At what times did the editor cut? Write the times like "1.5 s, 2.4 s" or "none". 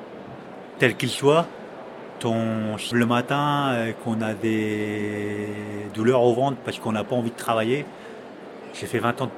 2.2 s, 2.9 s